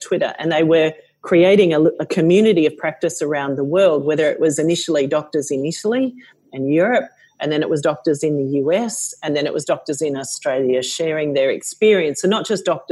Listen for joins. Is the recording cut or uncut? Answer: uncut